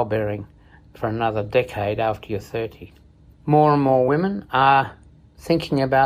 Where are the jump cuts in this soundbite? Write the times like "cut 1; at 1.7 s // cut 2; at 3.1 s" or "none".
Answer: none